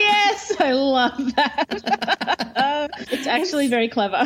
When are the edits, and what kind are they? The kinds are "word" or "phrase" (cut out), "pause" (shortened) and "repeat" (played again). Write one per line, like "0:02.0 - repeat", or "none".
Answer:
0:03.1 - word